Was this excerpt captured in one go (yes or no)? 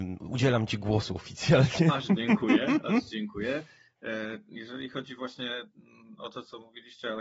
yes